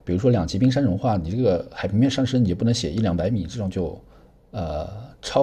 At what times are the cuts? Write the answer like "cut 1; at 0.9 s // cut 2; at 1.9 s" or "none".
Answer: none